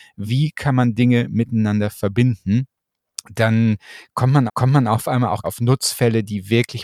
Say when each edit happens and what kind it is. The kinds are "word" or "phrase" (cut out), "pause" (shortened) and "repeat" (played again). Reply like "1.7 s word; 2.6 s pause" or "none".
4.5 s repeat; 5.4 s phrase